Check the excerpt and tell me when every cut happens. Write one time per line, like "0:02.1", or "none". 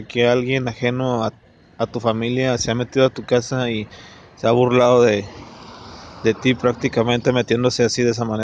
none